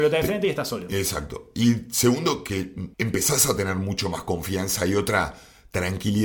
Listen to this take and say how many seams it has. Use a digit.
1